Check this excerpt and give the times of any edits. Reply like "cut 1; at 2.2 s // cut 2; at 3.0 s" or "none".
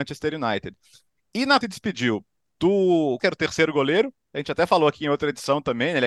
cut 1; at 1.6 s // cut 2; at 3.2 s